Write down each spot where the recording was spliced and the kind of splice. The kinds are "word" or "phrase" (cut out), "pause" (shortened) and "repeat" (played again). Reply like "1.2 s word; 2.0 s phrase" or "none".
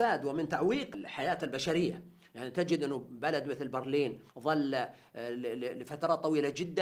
4.3 s pause